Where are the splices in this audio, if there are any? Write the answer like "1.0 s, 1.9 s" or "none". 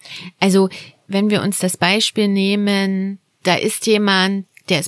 none